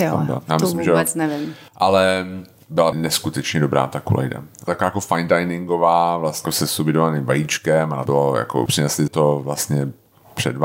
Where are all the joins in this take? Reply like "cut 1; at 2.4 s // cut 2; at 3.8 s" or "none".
cut 1; at 2.9 s // cut 2; at 4.7 s // cut 3; at 6.4 s // cut 4; at 8.1 s // cut 5; at 8.7 s // cut 6; at 9.1 s